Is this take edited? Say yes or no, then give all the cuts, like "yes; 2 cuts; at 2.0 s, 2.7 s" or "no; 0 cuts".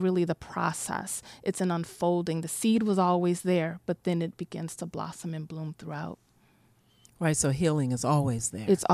no; 0 cuts